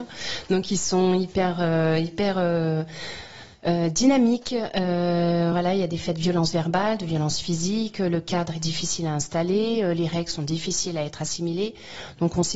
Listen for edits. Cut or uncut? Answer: uncut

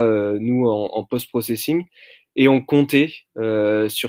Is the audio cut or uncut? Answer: uncut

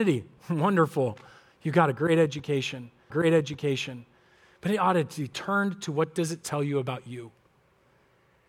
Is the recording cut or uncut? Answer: cut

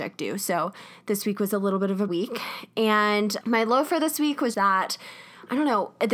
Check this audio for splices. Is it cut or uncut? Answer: cut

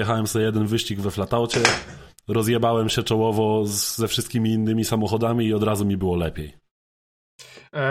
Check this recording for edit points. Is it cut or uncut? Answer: uncut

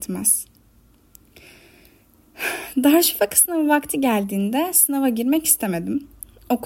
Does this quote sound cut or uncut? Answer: uncut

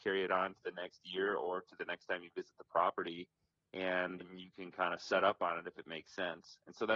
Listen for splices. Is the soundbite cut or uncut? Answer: cut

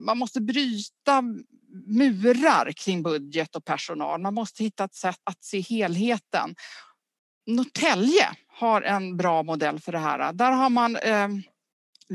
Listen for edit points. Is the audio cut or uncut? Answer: cut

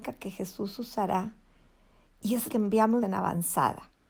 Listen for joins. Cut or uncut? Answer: cut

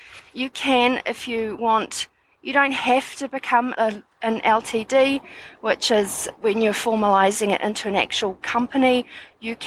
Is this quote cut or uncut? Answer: cut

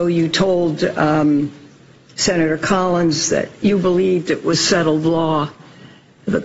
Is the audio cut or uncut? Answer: uncut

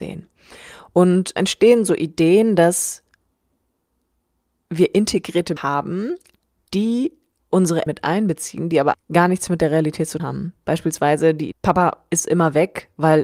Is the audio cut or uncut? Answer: cut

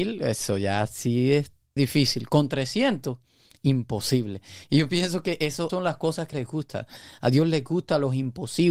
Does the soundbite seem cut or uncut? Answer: cut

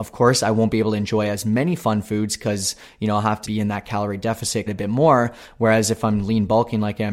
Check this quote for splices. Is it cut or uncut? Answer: cut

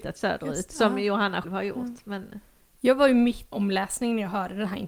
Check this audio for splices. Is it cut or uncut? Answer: cut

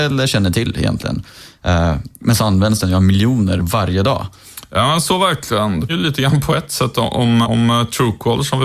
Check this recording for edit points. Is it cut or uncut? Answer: cut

